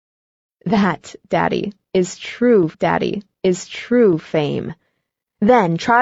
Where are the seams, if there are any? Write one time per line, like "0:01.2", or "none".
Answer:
0:02.7

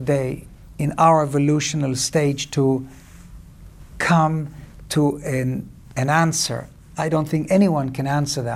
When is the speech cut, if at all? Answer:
none

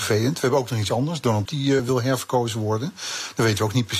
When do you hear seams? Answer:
0:01.5
0:01.8

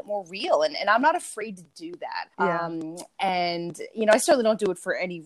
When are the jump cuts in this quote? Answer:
0:02.3

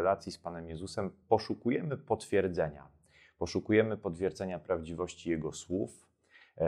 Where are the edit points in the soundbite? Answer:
none

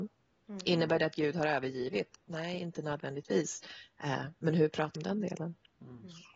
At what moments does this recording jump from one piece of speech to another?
0:04.9

